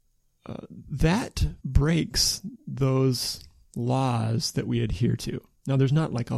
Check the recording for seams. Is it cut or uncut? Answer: cut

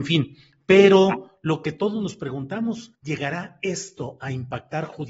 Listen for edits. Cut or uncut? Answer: cut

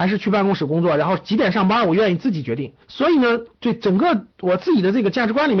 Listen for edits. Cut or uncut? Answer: cut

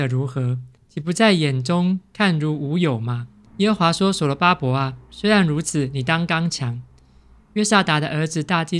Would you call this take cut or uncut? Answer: uncut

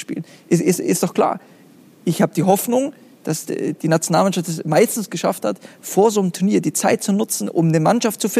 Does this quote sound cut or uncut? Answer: uncut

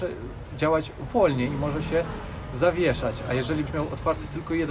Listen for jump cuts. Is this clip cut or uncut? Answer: cut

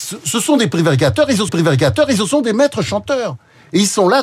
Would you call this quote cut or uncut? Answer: cut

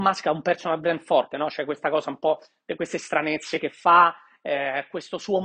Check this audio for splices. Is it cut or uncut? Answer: uncut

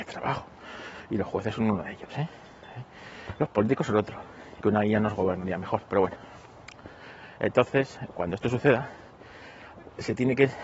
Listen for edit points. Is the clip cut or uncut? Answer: cut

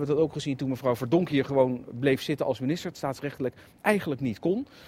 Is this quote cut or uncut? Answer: cut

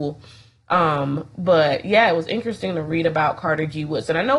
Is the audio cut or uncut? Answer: uncut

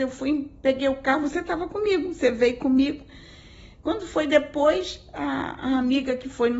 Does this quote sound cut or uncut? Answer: uncut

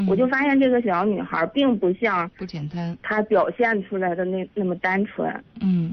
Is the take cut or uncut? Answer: uncut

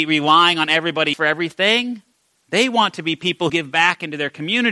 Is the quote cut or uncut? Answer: cut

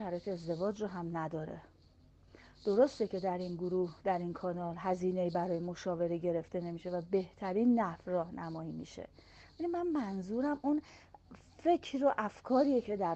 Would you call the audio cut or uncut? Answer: uncut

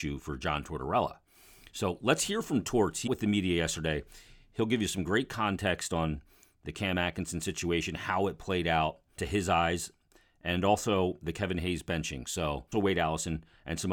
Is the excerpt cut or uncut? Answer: cut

